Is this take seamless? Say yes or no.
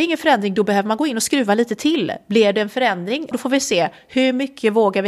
no